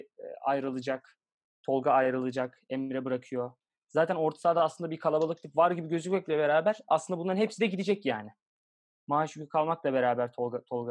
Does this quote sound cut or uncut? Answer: uncut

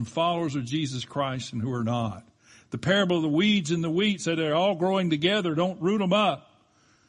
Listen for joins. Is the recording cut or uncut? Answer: uncut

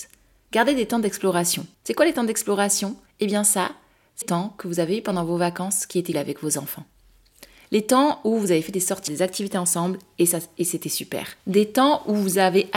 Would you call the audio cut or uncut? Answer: cut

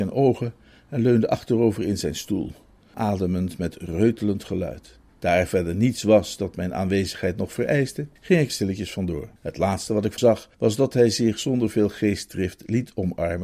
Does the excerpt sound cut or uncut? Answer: cut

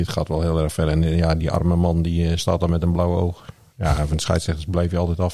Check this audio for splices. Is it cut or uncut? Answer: uncut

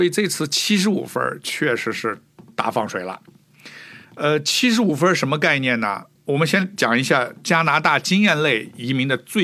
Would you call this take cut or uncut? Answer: cut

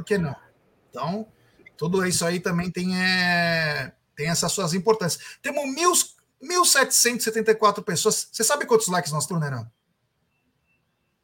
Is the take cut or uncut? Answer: cut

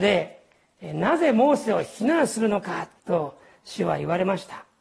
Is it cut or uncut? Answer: cut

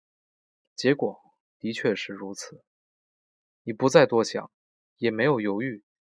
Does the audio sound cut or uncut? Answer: uncut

